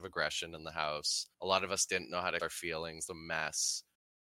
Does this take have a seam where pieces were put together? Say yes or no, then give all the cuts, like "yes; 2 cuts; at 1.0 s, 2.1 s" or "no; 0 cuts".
yes; 3 cuts; at 1.3 s, 2.4 s, 3.1 s